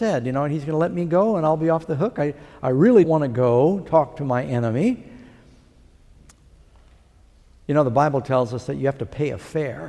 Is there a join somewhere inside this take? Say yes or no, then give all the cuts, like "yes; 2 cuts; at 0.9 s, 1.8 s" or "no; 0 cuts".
yes; 1 cut; at 3.0 s